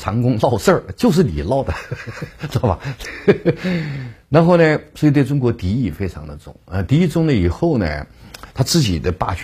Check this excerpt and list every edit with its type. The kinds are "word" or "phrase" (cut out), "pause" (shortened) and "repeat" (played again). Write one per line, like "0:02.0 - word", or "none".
0:08.5 - pause